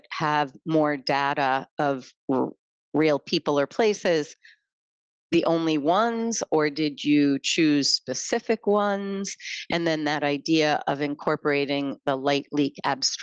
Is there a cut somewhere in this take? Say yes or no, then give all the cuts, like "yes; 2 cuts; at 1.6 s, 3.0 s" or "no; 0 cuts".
no; 0 cuts